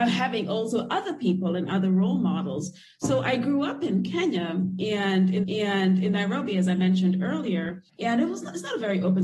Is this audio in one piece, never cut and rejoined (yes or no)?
no